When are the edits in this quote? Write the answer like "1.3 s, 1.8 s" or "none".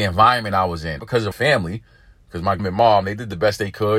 1.0 s, 1.3 s, 2.6 s